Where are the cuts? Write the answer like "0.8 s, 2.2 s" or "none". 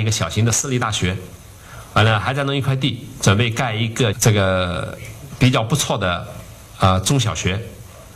4.1 s